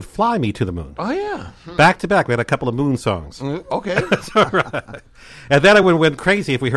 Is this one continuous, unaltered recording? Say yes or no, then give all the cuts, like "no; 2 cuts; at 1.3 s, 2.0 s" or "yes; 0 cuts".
yes; 0 cuts